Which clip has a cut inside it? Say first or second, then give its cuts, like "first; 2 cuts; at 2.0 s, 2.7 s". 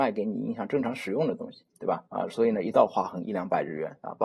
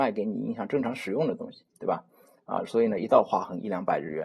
first; 1 cut; at 2.1 s